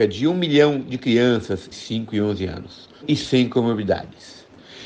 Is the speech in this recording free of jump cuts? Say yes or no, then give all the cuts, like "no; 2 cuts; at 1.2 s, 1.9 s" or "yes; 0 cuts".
no; 2 cuts; at 1.7 s, 3.0 s